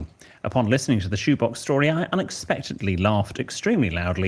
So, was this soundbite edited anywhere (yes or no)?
no